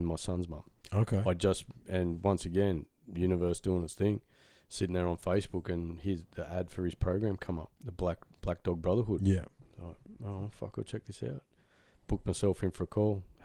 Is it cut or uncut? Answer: cut